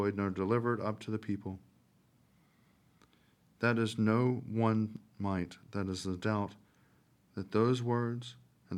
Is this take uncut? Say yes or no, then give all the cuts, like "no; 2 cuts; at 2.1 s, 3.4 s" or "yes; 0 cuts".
yes; 0 cuts